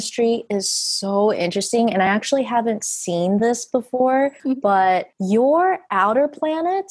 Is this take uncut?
yes; 0 cuts

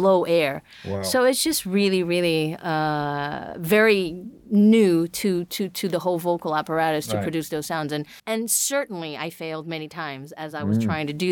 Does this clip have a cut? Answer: yes; 1 cut; at 8.2 s

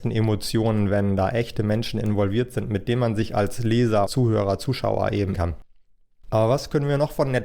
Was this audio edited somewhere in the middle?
yes; 2 cuts; at 4.1 s, 5.3 s

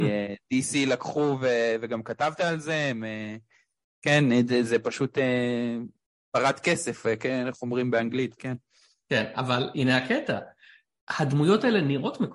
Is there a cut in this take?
no; 0 cuts

